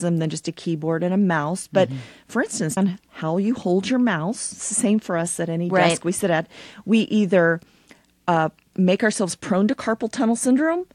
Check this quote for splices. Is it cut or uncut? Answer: cut